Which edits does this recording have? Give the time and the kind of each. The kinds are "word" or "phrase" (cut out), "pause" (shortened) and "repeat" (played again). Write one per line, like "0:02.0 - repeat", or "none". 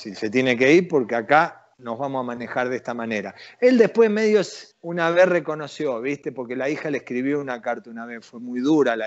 0:01.7 - pause
0:04.7 - pause